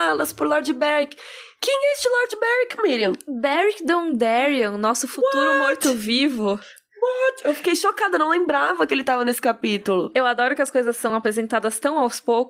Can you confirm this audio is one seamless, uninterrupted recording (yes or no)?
yes